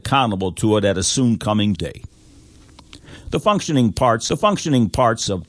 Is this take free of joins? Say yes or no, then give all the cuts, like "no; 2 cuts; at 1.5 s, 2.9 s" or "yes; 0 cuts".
no; 2 cuts; at 1.8 s, 4.3 s